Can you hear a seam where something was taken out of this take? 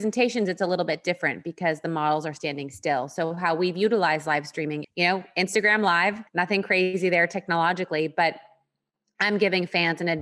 yes; 2 cuts; at 4.8 s, 6.3 s

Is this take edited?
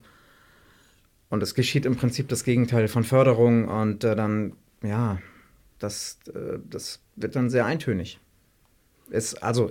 no; 0 cuts

